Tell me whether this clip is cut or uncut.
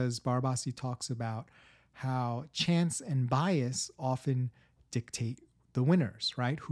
uncut